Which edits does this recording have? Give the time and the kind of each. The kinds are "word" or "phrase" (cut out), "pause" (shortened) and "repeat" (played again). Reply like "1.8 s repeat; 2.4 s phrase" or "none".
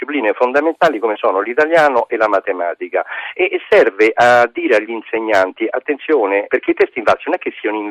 6.5 s word